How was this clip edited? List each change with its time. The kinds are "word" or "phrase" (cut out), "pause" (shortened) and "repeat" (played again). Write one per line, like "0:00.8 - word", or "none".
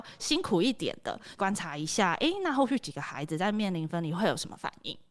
none